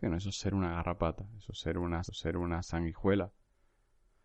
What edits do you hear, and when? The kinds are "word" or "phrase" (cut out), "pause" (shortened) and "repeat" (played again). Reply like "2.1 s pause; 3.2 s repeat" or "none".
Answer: 2.1 s repeat